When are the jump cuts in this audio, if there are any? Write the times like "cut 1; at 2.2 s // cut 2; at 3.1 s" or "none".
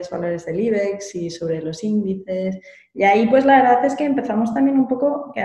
none